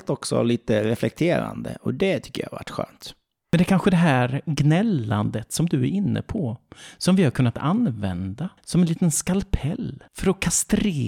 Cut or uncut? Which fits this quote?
cut